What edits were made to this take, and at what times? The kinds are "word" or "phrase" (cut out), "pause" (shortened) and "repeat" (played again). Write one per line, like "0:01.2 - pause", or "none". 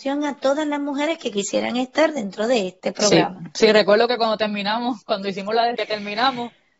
0:05.7 - word